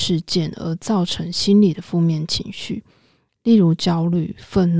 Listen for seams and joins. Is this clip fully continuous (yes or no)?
yes